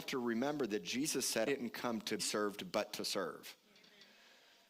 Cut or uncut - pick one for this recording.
cut